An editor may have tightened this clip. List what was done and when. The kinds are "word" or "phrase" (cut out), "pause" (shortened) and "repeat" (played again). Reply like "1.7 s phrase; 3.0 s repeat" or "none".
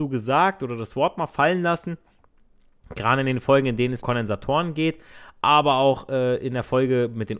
4.0 s word